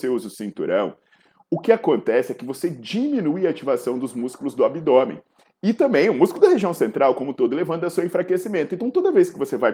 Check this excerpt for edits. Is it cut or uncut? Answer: uncut